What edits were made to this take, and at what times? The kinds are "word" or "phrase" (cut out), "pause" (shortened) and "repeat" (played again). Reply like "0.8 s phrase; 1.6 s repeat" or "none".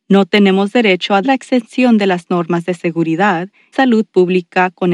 1.2 s word; 3.7 s word